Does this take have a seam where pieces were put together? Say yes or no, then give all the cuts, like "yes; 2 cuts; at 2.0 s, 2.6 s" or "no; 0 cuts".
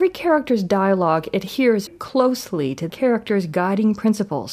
yes; 2 cuts; at 1.9 s, 2.9 s